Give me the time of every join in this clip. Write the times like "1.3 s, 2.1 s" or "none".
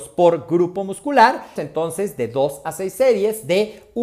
1.6 s